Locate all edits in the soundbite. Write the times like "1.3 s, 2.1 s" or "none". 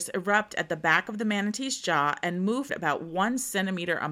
2.7 s